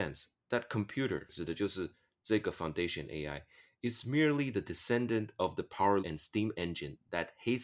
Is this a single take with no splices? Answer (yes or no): no